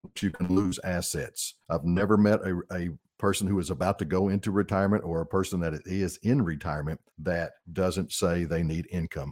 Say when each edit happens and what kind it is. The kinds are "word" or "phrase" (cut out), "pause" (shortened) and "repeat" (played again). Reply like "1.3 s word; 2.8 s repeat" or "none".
1.6 s pause; 7.1 s pause